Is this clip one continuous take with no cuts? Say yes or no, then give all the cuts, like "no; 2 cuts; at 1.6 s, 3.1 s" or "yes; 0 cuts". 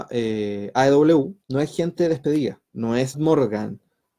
no; 3 cuts; at 1.4 s, 2.7 s, 3.1 s